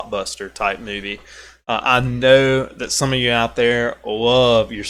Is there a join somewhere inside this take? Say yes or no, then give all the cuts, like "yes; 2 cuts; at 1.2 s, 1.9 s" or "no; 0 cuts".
no; 0 cuts